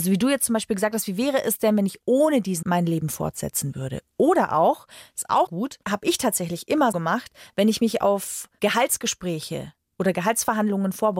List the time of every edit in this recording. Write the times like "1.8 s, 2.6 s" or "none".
2.6 s, 5.5 s, 5.8 s, 6.9 s